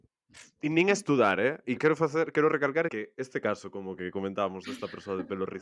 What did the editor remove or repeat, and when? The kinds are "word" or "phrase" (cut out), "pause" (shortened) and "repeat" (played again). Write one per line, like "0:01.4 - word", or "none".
0:01.8 - word
0:02.9 - phrase